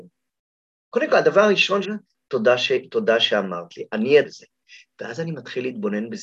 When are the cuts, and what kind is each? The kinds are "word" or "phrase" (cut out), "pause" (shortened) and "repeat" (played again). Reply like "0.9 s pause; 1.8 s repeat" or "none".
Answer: 1.8 s word; 4.2 s word